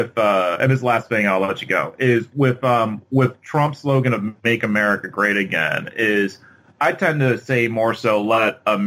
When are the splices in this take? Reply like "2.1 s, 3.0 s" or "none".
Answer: none